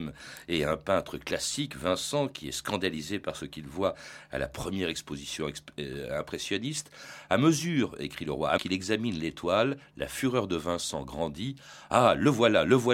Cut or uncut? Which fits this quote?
cut